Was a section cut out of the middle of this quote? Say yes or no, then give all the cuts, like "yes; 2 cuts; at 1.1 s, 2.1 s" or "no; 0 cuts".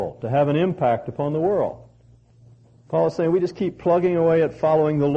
no; 0 cuts